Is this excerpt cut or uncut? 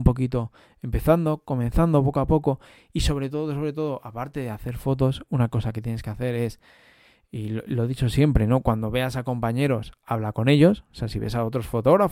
uncut